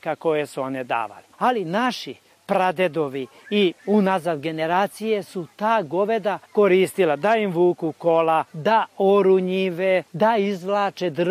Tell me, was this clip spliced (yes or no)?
yes